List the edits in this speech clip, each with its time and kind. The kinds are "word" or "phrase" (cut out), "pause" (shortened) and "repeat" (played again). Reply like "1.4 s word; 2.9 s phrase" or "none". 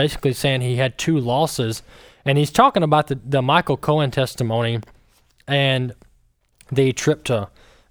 none